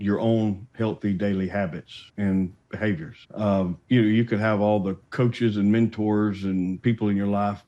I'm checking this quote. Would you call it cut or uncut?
cut